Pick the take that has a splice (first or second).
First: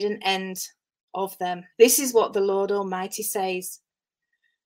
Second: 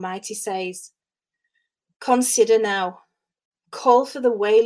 first